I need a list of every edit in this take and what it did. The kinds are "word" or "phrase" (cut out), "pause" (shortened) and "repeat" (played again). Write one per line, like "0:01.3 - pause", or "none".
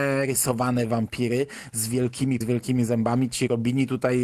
0:02.4 - word